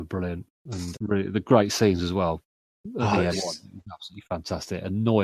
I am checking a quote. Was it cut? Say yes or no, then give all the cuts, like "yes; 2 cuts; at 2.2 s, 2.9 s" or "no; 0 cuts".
yes; 2 cuts; at 0.9 s, 3.3 s